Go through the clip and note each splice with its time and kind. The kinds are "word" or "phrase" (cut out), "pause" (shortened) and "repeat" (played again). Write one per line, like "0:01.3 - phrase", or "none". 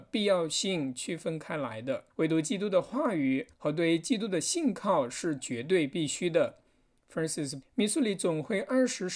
0:02.1 - pause
0:03.5 - pause
0:07.6 - word